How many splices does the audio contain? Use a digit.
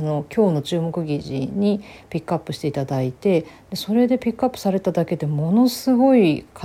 0